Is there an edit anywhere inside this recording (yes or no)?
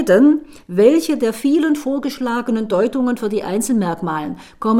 no